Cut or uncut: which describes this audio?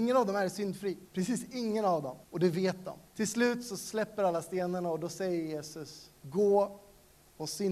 cut